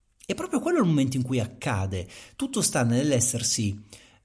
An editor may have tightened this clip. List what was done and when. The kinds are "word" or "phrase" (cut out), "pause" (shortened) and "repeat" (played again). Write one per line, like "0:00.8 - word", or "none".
none